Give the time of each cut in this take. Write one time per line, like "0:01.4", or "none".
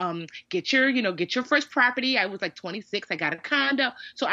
none